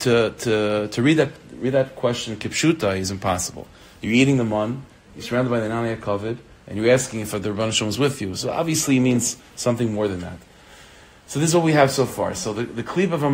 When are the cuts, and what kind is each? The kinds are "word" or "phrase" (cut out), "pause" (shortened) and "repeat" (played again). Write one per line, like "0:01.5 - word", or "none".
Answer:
none